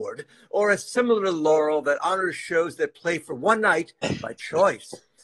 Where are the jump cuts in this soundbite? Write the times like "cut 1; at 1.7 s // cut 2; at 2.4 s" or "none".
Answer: none